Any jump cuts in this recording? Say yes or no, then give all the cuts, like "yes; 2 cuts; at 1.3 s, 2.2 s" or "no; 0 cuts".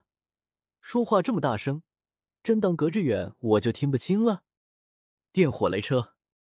no; 0 cuts